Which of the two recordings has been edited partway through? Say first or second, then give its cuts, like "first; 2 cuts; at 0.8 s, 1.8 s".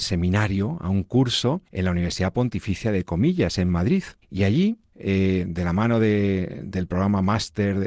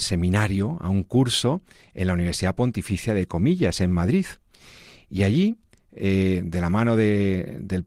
first; 3 cuts; at 1.7 s, 4.2 s, 4.9 s